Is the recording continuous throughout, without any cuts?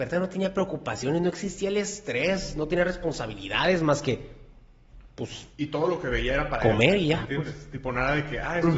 yes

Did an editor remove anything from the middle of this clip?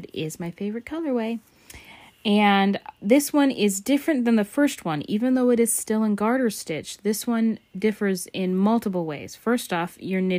no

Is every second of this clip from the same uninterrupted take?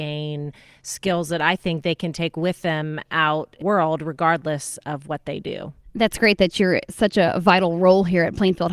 no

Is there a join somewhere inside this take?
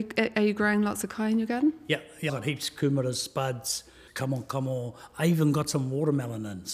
yes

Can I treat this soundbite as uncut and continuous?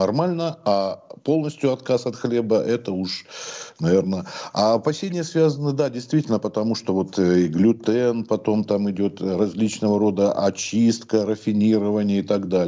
yes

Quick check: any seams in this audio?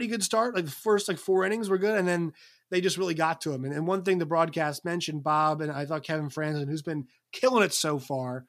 no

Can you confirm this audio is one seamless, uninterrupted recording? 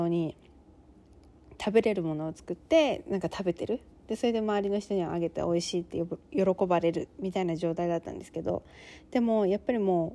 yes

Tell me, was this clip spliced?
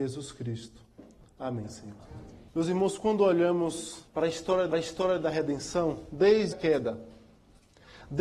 yes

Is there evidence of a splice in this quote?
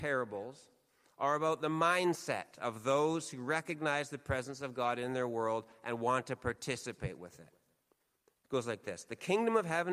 yes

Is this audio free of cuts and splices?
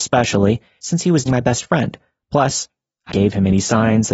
no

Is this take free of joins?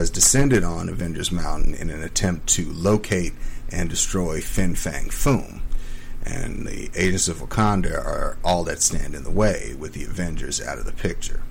yes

